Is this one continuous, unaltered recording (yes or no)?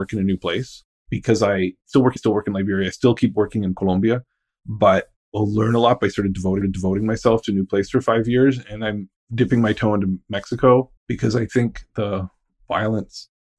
no